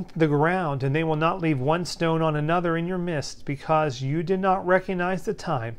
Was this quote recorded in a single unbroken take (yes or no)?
yes